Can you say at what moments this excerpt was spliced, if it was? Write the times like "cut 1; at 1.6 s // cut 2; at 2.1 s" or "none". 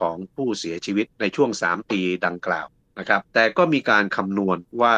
cut 1; at 3.2 s